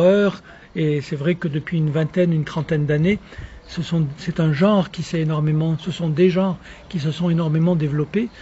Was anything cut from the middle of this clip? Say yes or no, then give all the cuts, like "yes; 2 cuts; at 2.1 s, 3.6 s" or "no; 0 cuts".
no; 0 cuts